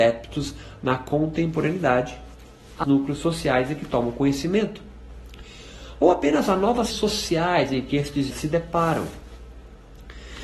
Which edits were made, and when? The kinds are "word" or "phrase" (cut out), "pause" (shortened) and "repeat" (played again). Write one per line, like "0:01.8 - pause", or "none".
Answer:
0:02.8 - word
0:06.9 - word
0:08.3 - word